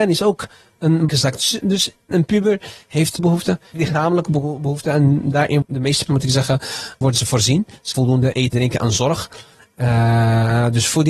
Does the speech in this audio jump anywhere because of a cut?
yes; 9 cuts; at 1.1 s, 2.1 s, 3.2 s, 3.7 s, 5.6 s, 6.1 s, 7.0 s, 7.9 s, 8.5 s

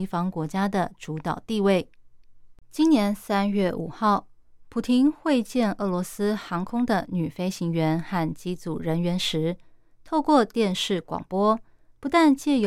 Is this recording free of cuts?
no; 1 cut; at 2.6 s

